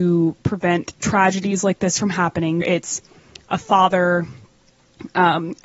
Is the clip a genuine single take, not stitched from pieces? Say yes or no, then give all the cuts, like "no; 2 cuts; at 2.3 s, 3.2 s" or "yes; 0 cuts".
no; 1 cut; at 2.6 s